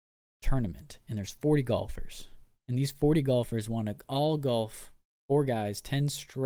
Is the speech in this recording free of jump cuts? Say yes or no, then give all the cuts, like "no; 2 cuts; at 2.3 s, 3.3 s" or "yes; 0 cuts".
yes; 0 cuts